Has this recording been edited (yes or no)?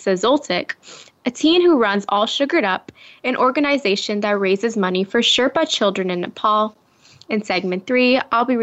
no